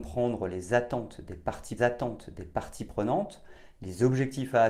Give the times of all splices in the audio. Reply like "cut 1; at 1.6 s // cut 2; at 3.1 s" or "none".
cut 1; at 1.8 s